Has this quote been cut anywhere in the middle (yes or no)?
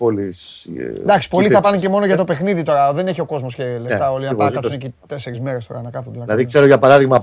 no